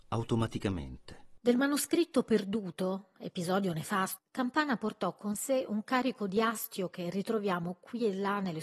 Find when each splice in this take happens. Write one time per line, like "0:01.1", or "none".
0:04.2